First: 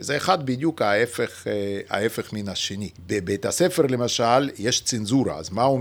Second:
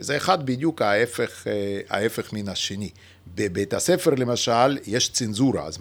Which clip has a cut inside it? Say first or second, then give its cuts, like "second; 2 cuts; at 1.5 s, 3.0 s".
first; 1 cut; at 3.0 s